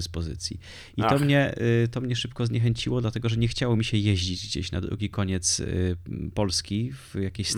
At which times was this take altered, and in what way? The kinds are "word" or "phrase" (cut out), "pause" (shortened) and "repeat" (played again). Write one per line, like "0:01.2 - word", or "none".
none